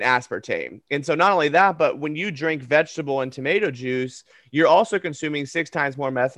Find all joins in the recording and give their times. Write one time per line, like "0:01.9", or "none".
none

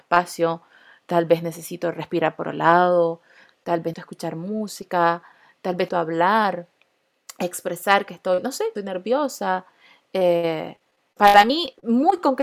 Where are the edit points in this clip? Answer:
0:02.4
0:03.9
0:05.9
0:08.8
0:11.2

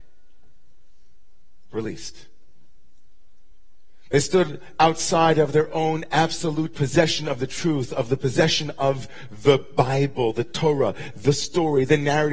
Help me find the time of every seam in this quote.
none

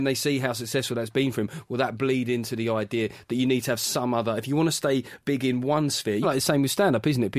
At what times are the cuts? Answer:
0:06.2

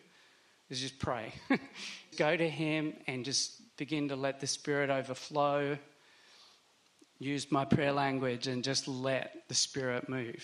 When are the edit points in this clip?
0:02.1

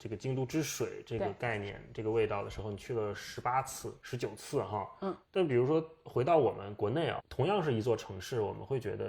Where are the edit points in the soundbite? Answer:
0:07.2

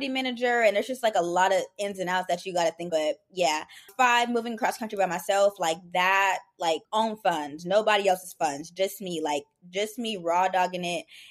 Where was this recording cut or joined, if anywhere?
0:02.9
0:03.9
0:06.8

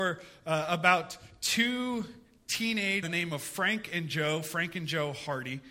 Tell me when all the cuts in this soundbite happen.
0:03.0

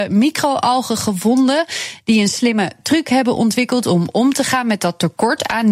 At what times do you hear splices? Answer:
none

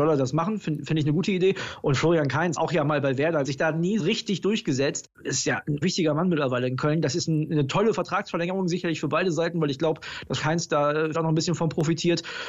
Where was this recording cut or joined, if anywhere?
0:02.6
0:03.4
0:04.0
0:05.8
0:10.4
0:11.1

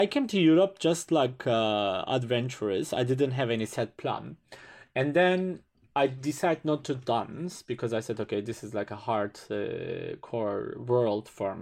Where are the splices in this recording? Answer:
none

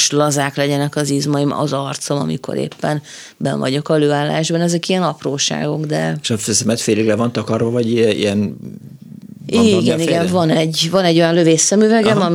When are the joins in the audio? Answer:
none

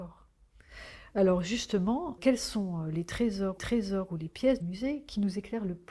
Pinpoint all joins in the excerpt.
0:02.2
0:03.6
0:04.6

